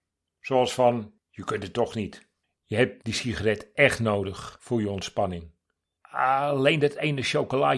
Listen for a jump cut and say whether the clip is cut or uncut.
cut